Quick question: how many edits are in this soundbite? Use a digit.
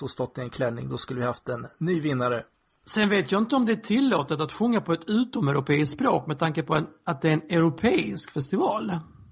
0